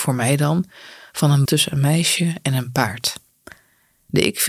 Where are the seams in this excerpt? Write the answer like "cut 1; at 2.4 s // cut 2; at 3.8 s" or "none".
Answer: cut 1; at 1.5 s